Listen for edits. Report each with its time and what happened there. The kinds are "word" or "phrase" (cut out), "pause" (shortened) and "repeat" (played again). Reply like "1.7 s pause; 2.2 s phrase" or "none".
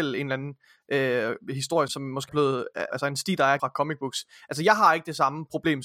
1.9 s word; 2.3 s word; 2.9 s word; 3.6 s phrase